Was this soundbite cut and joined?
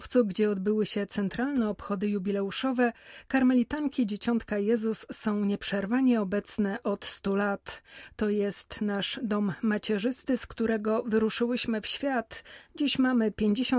no; 0 cuts

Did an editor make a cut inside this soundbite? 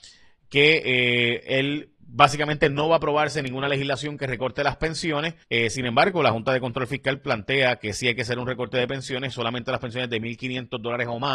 yes; 1 cut; at 5.4 s

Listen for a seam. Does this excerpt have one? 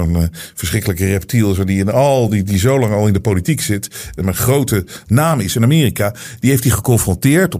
no; 0 cuts

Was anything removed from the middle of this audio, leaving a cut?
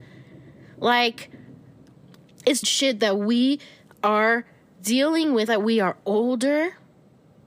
yes; 2 cuts; at 2.6 s, 5.5 s

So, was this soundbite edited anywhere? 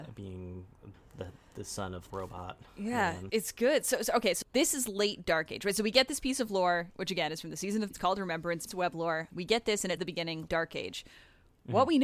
yes; 9 cuts; at 0.9 s, 2.1 s, 3.3 s, 4.4 s, 7.9 s, 8.7 s, 9.3 s, 10.0 s, 10.5 s

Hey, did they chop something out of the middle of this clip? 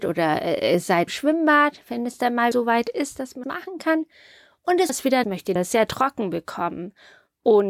yes; 6 cuts; at 1.1 s, 2.5 s, 3.4 s, 4.9 s, 5.2 s, 5.6 s

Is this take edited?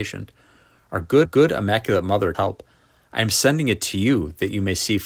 yes; 2 cuts; at 1.2 s, 2.3 s

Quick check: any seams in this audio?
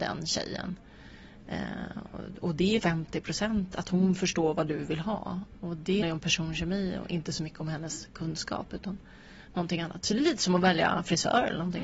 yes; 2 cuts; at 2.8 s, 6.0 s

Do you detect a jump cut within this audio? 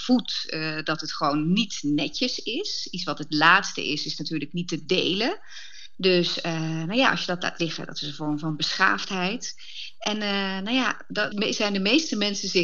yes; 1 cut; at 11.3 s

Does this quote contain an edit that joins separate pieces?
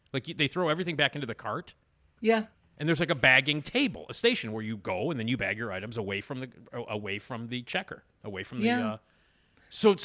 no; 0 cuts

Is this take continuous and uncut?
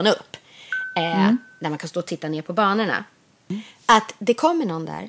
yes; 0 cuts

